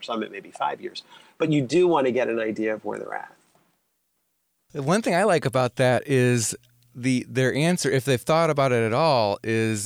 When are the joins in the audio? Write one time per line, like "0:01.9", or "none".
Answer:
none